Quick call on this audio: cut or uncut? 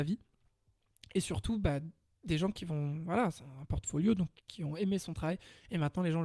uncut